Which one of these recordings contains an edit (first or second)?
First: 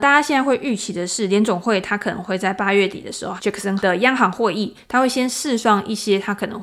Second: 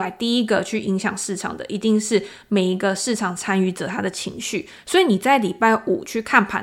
first